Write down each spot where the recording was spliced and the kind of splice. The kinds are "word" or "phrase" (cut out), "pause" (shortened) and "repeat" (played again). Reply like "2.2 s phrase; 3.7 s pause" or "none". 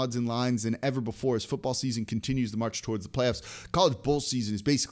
none